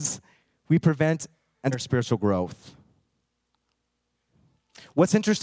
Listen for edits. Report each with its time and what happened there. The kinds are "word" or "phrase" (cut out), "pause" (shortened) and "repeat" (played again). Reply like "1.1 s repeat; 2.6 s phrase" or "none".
1.7 s word